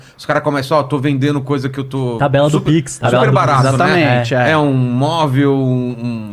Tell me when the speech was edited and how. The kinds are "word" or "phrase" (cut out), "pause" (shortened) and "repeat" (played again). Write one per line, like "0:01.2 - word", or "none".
none